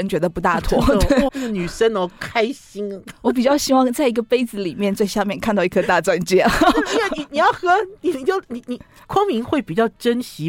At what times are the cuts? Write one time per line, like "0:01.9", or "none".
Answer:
0:01.3